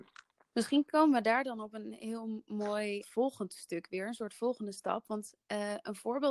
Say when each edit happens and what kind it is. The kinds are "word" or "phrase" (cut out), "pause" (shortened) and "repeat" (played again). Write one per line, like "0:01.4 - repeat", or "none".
0:03.0 - word